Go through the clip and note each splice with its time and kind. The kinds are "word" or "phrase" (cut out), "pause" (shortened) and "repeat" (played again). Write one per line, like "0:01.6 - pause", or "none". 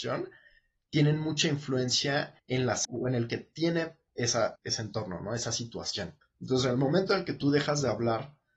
0:02.4 - pause
0:02.8 - word
0:03.3 - word
0:04.1 - word
0:04.6 - word
0:06.2 - pause